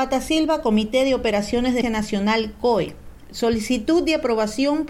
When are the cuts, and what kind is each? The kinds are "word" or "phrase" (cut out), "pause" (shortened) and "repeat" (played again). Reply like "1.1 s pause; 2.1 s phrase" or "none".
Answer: 1.8 s word